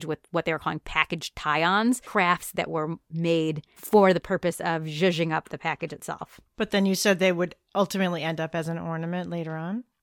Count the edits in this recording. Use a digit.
1